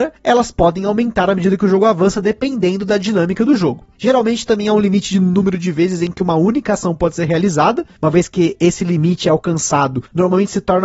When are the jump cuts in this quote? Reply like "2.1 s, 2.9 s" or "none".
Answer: none